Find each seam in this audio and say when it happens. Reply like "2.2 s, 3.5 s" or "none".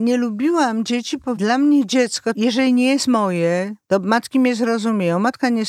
3.8 s